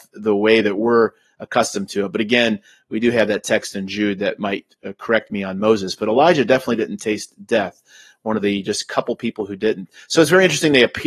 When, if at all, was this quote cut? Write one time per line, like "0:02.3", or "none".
none